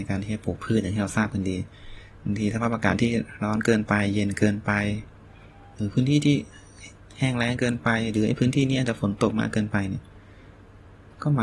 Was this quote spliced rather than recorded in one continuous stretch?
no; 0 cuts

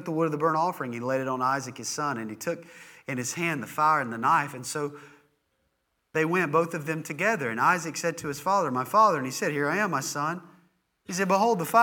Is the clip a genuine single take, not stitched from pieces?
yes; 0 cuts

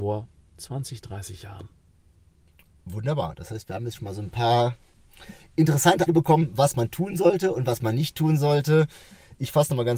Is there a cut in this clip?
yes; 1 cut; at 6.1 s

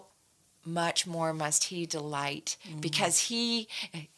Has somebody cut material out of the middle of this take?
no; 0 cuts

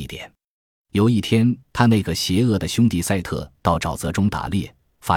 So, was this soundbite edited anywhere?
yes; 1 cut; at 1.6 s

